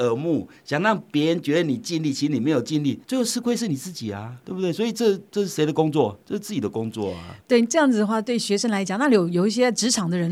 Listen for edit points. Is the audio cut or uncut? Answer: cut